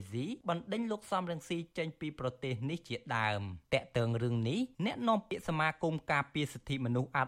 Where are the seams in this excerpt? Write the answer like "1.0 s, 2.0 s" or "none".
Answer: 3.6 s, 4.7 s